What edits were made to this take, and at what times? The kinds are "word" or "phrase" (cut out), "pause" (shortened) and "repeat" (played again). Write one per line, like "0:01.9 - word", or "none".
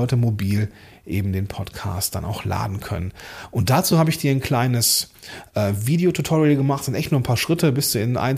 none